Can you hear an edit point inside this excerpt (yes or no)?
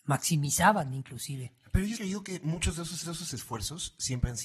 yes